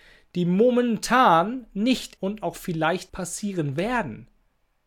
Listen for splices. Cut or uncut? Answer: cut